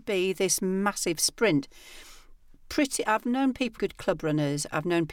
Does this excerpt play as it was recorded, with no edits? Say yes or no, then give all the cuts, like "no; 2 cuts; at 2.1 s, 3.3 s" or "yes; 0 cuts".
no; 1 cut; at 3.8 s